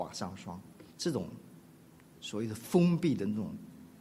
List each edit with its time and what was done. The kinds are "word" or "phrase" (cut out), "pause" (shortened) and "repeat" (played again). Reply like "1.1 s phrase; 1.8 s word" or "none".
0.9 s pause